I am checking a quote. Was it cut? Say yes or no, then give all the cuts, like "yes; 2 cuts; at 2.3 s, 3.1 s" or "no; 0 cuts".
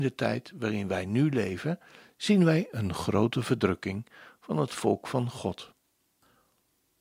no; 0 cuts